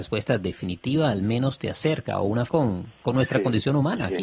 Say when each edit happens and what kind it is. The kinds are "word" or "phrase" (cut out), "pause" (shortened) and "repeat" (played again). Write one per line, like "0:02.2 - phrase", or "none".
0:02.5 - phrase
0:02.9 - word